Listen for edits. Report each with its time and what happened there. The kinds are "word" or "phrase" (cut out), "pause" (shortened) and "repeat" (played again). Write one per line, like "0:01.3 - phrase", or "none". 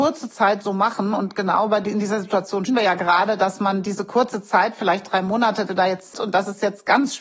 0:02.7 - word
0:05.7 - word
0:06.1 - word